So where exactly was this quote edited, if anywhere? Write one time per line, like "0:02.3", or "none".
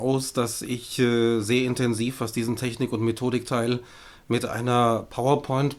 none